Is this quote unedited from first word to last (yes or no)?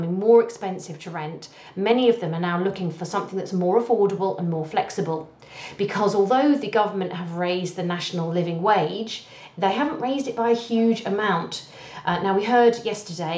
yes